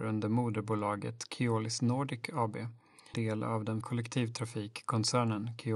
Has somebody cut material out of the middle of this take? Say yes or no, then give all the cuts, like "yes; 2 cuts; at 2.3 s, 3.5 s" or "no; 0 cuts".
yes; 2 cuts; at 3.1 s, 3.8 s